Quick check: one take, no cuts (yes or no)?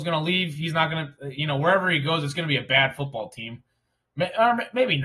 yes